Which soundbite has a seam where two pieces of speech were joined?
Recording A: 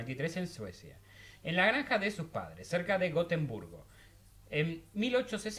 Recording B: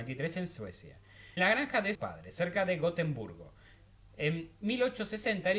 B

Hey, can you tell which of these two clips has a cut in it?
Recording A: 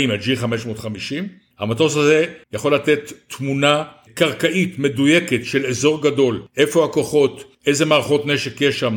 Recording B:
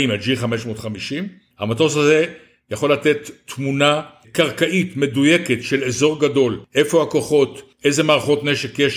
A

